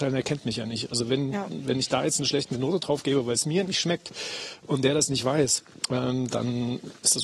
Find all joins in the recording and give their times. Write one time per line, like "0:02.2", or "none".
none

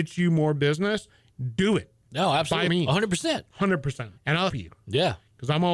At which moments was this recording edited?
0:02.7
0:04.2
0:04.5

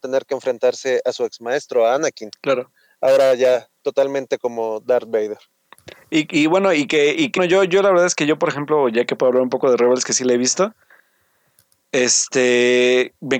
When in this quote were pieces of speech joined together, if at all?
0:07.4

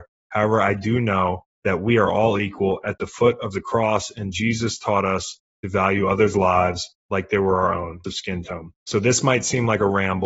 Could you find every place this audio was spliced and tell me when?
0:01.5
0:07.0
0:08.0
0:08.8

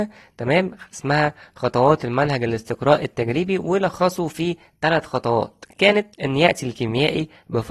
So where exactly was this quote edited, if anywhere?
0:06.1

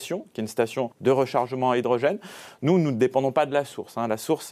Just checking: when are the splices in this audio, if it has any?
0:00.9

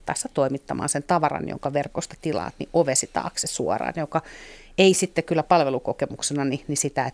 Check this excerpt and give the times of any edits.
none

